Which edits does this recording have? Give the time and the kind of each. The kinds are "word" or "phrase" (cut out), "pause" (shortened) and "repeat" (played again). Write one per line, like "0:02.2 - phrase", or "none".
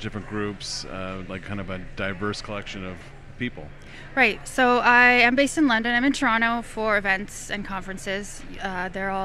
none

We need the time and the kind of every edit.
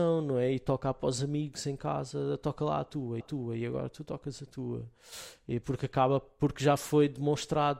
0:03.2 - repeat
0:05.6 - word

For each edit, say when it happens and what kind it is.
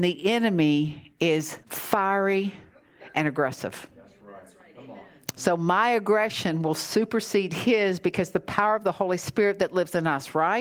0:01.6 - pause

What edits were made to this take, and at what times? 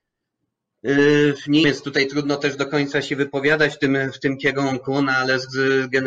0:01.6 - phrase

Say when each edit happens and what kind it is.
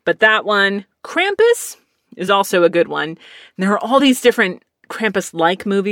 none

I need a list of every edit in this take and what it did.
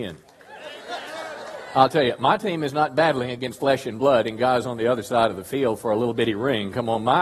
none

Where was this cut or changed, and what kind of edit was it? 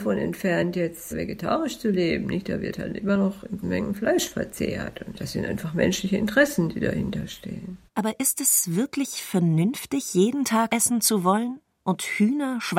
0:03.6 - word
0:07.9 - pause
0:10.7 - word

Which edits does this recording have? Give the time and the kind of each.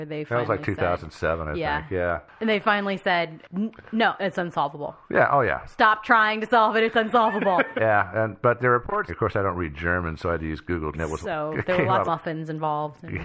0:04.2 - word
0:07.8 - word
0:09.1 - word
0:10.9 - word
0:12.0 - word

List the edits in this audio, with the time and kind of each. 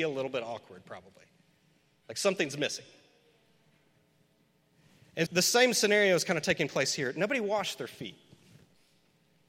0:05.3 - word

